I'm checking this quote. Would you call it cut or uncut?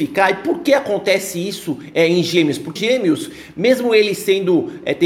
cut